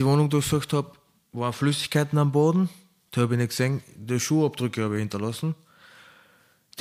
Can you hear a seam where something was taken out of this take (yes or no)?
no